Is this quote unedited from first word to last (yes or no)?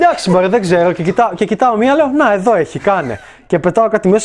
yes